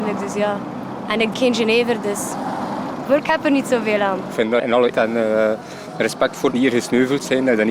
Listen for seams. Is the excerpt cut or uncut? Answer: cut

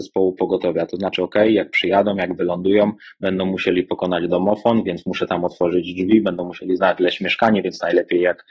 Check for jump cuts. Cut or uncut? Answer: uncut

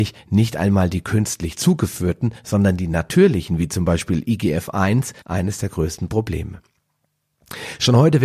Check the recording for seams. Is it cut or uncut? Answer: cut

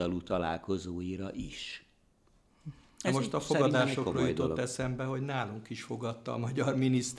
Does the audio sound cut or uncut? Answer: uncut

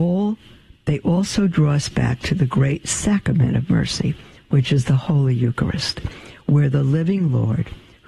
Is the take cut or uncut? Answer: uncut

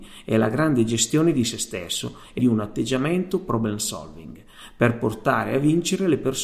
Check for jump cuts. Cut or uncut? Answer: cut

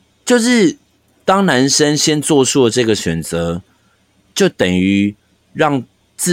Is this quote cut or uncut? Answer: uncut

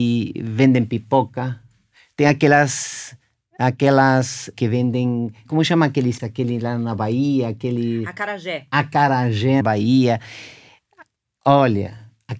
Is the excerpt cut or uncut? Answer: cut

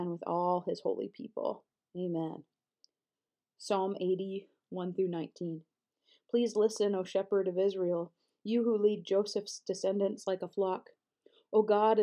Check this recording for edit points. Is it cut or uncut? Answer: uncut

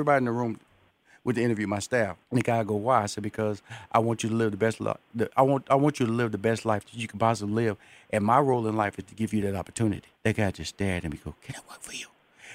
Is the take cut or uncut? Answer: cut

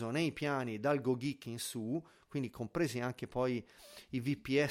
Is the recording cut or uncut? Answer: uncut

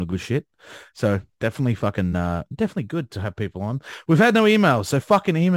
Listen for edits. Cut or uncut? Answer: uncut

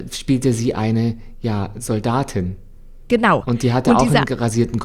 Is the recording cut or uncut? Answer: uncut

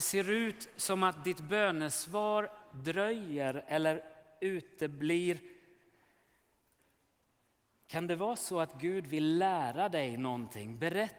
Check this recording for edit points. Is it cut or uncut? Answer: uncut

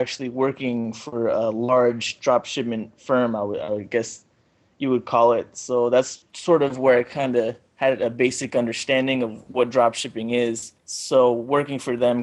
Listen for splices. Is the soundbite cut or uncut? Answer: cut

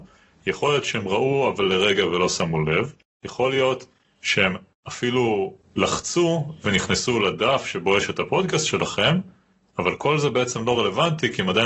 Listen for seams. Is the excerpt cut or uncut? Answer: uncut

